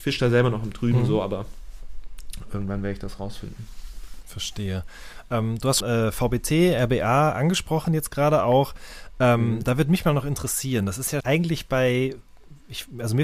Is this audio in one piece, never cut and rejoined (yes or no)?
no